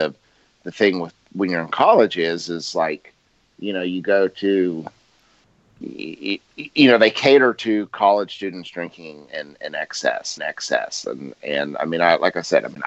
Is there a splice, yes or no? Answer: yes